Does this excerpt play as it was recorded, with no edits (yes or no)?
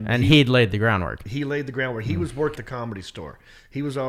no